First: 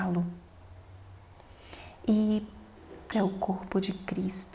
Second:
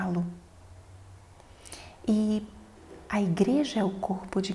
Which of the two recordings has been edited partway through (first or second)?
first